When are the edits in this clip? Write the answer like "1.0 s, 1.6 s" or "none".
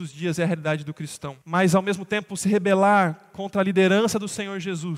1.4 s